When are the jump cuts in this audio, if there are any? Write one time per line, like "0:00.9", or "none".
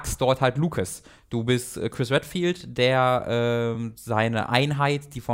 none